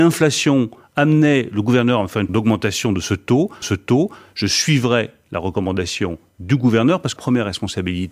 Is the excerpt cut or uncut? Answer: cut